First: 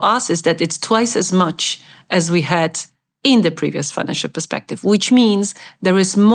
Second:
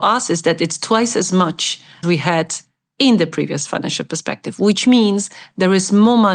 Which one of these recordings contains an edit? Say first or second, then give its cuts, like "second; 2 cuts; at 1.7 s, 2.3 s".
second; 1 cut; at 2.0 s